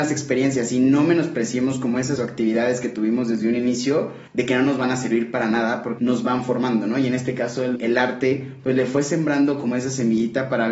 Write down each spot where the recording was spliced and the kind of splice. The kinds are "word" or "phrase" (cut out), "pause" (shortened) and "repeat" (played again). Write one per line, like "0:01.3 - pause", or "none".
0:02.2 - word
0:04.3 - pause
0:06.0 - word
0:07.8 - phrase

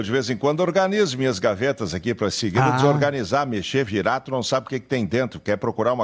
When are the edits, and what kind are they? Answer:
none

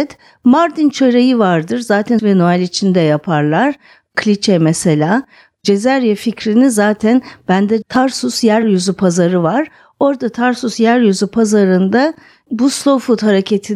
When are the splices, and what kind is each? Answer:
0:02.2 - phrase
0:07.8 - word

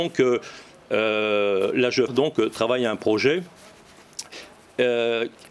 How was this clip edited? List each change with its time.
0:02.1 - word

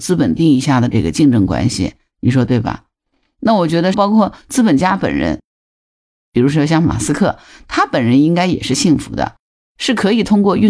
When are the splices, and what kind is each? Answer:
0:03.9 - phrase

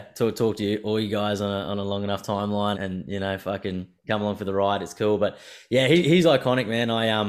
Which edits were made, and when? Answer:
0:02.8 - word

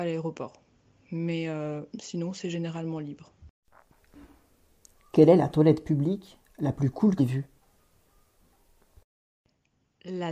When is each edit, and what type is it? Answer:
0:01.9 - word
0:07.2 - word

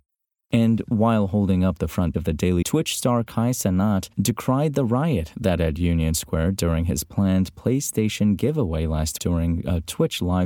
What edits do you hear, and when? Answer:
0:02.1 - word
0:02.6 - word
0:04.1 - pause
0:05.6 - word
0:09.2 - word

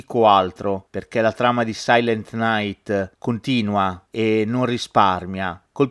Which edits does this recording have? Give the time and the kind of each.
none

